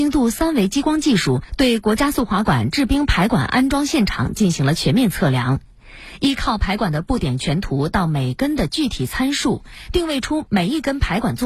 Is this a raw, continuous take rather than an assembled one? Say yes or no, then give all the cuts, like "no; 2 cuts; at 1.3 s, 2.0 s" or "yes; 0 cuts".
yes; 0 cuts